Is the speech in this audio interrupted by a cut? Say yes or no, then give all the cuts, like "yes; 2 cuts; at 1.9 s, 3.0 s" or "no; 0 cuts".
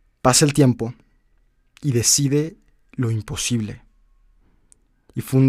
no; 0 cuts